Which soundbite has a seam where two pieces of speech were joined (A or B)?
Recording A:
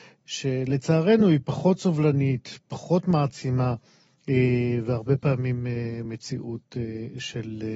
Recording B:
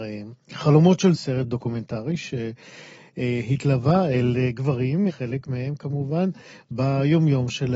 B